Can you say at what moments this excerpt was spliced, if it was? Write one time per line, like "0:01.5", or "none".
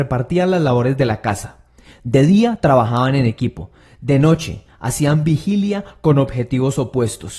none